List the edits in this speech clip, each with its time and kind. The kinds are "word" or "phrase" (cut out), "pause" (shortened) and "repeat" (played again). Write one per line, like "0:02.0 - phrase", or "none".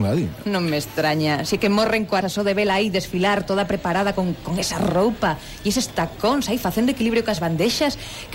0:02.2 - word